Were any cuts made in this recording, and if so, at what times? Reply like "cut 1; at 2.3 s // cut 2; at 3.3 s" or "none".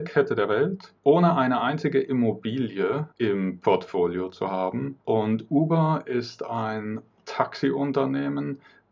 cut 1; at 1.0 s // cut 2; at 3.1 s // cut 3; at 5.0 s